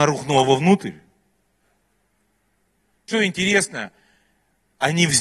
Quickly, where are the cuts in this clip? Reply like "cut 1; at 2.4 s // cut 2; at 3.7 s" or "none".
cut 1; at 3.1 s